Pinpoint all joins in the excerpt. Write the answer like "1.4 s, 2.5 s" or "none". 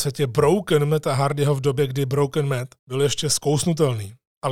2.8 s